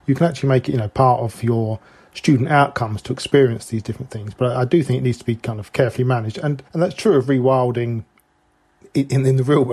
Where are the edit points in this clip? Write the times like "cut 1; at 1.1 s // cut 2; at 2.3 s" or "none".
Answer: cut 1; at 6.7 s

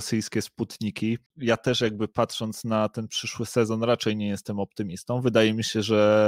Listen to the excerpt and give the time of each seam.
none

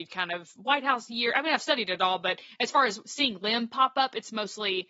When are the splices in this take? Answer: none

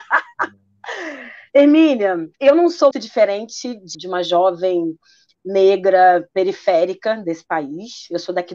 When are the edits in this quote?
cut 1; at 2.3 s // cut 2; at 2.9 s // cut 3; at 3.9 s

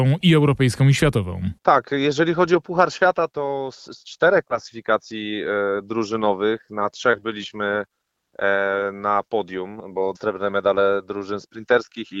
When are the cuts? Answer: cut 1; at 1.6 s // cut 2; at 3.3 s // cut 3; at 10.1 s

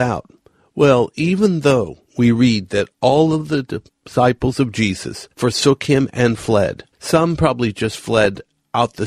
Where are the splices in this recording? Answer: cut 1; at 2.1 s // cut 2; at 5.3 s // cut 3; at 6.9 s

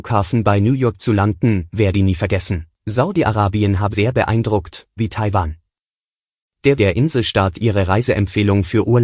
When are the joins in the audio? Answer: cut 1; at 1.9 s // cut 2; at 2.7 s // cut 3; at 3.9 s // cut 4; at 5.0 s // cut 5; at 6.8 s // cut 6; at 7.5 s

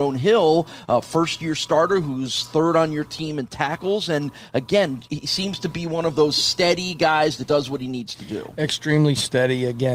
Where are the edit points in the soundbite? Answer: cut 1; at 7.5 s

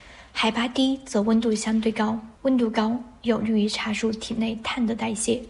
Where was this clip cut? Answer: cut 1; at 2.4 s

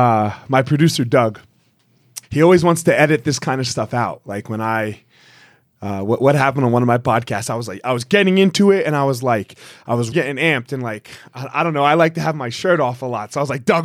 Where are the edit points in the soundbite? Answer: cut 1; at 2.2 s // cut 2; at 10.1 s

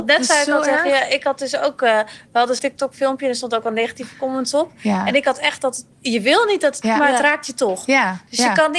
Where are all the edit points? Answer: cut 1; at 2.6 s // cut 2; at 5.9 s // cut 3; at 6.8 s

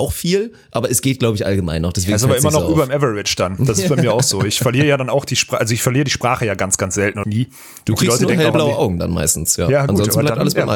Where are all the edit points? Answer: cut 1; at 7.2 s

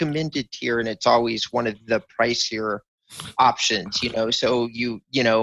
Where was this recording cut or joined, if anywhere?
none

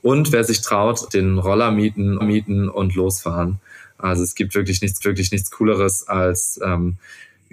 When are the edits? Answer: cut 1; at 1.1 s // cut 2; at 2.2 s // cut 3; at 5.0 s

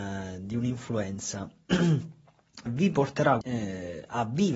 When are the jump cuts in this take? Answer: cut 1; at 2.7 s // cut 2; at 3.4 s

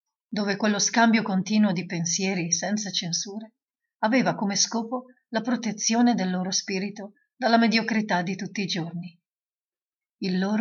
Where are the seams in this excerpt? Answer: none

